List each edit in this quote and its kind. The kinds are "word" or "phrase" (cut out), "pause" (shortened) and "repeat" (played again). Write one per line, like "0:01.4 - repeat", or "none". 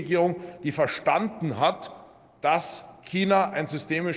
none